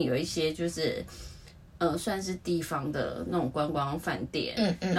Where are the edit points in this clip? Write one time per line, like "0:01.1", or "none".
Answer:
none